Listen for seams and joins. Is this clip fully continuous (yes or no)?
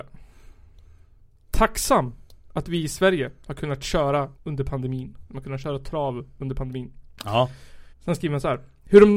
no